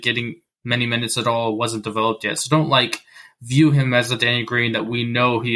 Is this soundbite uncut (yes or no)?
yes